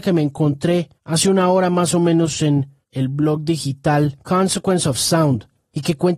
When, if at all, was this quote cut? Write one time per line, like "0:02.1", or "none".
0:01.0
0:02.8
0:04.2